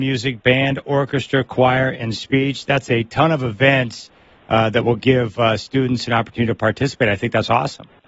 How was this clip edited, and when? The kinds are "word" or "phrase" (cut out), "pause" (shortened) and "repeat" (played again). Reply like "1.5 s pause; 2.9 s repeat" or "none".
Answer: none